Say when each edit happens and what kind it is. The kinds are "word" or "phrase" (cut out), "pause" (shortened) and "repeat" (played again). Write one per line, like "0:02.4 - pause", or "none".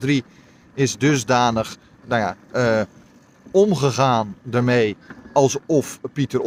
none